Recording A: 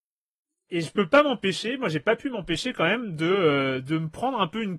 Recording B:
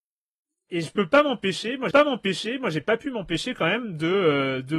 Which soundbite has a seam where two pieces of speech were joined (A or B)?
B